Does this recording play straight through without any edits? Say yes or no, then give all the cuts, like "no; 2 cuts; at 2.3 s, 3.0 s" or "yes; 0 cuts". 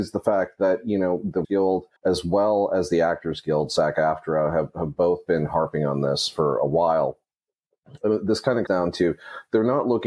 no; 3 cuts; at 1.4 s, 2.0 s, 8.7 s